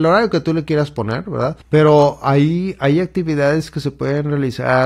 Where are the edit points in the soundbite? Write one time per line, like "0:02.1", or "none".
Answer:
0:01.6